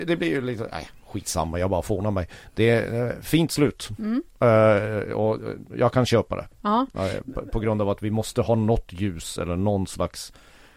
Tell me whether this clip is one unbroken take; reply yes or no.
yes